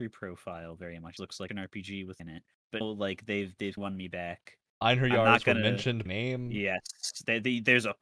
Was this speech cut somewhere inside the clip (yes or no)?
yes